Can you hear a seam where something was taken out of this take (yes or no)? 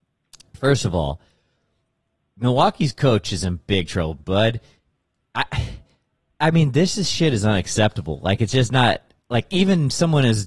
no